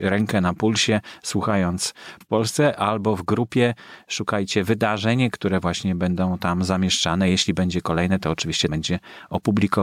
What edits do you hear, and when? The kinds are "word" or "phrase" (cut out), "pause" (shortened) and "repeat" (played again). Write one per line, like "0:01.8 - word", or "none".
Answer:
0:02.2 - word
0:05.3 - word
0:08.7 - word